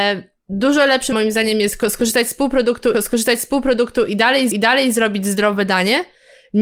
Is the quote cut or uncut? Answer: cut